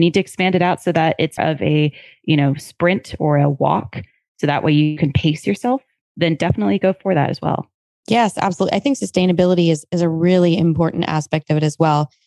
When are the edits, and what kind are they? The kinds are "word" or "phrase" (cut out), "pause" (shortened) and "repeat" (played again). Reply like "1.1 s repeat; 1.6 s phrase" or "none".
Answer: 1.4 s word